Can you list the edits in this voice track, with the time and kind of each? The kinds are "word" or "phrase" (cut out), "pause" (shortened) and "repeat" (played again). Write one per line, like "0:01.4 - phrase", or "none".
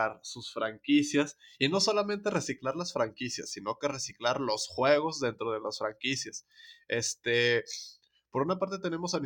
none